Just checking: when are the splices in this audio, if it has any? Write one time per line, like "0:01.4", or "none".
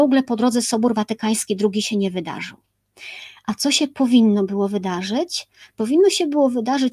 none